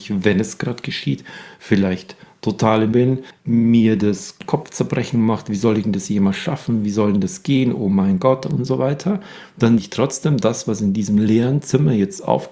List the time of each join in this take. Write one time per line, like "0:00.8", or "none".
0:02.9
0:09.8

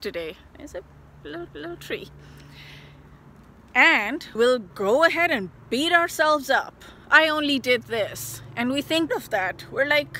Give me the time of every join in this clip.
0:01.5
0:04.4
0:04.7
0:09.1

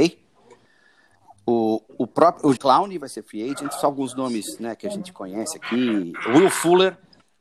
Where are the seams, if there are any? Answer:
0:01.9
0:02.6

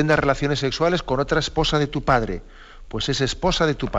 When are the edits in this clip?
none

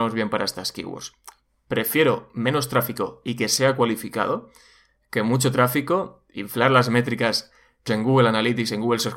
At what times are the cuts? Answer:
0:07.9

